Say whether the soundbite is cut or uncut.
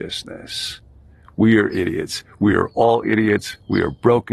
uncut